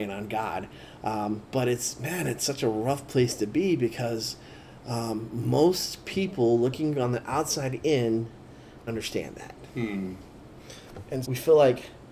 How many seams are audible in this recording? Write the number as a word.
two